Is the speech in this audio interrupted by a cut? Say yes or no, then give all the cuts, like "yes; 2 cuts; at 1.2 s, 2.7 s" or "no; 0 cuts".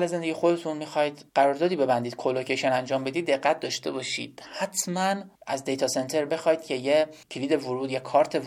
yes; 3 cuts; at 1.3 s, 5.4 s, 7.2 s